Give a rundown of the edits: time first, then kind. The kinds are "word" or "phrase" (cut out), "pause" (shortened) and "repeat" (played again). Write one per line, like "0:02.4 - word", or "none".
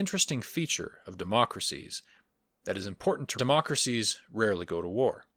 0:03.3 - phrase